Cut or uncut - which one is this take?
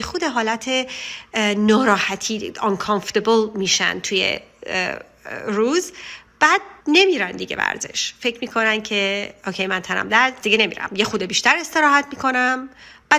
cut